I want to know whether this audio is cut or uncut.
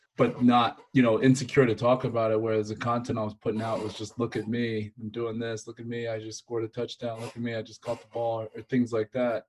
uncut